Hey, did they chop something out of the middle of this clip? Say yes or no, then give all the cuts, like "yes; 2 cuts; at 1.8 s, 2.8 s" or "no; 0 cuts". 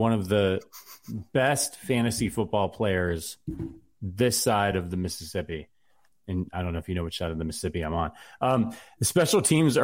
no; 0 cuts